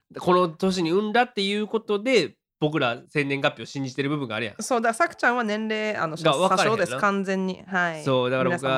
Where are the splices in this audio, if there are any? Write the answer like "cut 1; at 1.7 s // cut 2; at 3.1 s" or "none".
cut 1; at 3.1 s